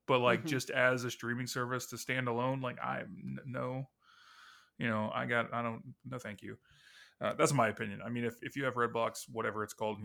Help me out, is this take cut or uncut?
uncut